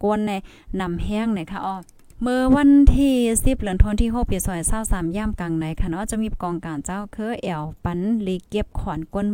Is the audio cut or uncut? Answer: cut